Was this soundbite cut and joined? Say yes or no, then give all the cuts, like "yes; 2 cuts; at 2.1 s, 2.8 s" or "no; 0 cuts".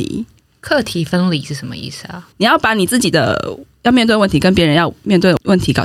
yes; 1 cut; at 2.3 s